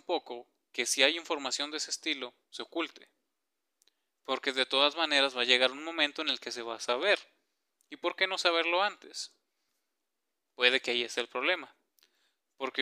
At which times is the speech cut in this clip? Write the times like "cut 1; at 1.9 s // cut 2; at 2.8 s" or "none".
none